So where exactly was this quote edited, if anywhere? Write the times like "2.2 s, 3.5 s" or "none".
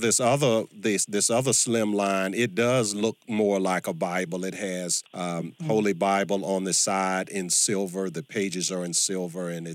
5.1 s